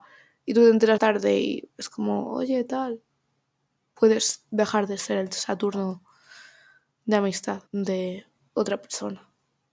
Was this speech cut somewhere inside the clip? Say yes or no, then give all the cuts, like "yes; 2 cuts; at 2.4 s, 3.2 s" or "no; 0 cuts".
yes; 2 cuts; at 1.0 s, 7.7 s